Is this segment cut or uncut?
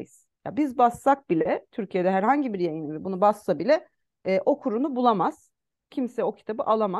uncut